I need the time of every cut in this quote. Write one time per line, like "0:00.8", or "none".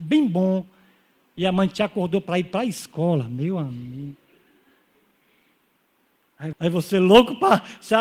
0:06.5